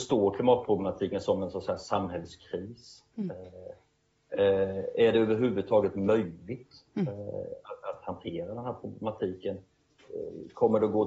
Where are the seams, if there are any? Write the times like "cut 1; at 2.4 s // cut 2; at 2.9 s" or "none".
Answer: none